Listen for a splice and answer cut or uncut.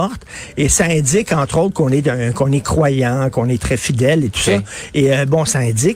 cut